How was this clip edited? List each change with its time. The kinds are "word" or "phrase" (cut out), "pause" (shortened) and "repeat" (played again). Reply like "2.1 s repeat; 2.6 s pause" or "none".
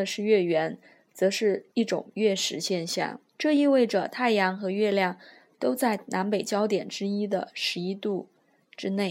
1.7 s pause; 3.3 s pause